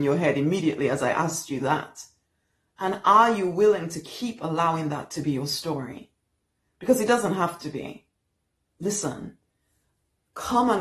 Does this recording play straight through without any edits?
yes; 0 cuts

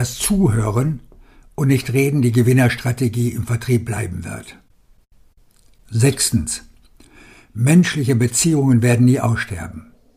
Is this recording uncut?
yes; 0 cuts

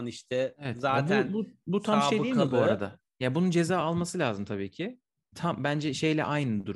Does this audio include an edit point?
no; 0 cuts

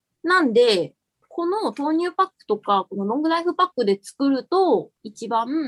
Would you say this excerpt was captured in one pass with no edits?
yes; 0 cuts

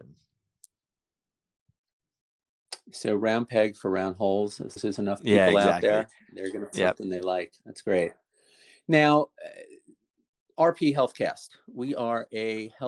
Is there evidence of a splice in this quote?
yes; 2 cuts; at 4.8 s, 6.7 s

